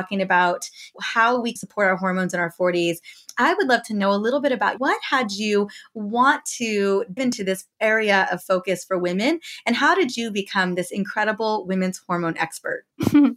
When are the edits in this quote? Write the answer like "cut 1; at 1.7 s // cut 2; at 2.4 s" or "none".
cut 1; at 1.6 s // cut 2; at 4.8 s // cut 3; at 7.2 s